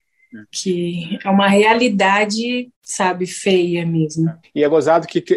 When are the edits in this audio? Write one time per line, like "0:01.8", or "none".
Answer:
0:02.7
0:04.4